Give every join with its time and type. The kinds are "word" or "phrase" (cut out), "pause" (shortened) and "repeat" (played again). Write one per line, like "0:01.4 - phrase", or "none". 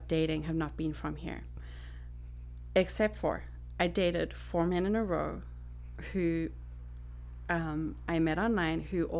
none